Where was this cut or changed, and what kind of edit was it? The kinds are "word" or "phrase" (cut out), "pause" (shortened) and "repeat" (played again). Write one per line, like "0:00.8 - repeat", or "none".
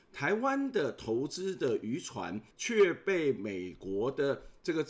0:02.5 - pause